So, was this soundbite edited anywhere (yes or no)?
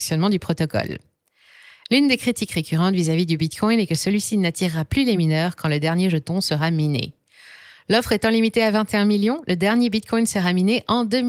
no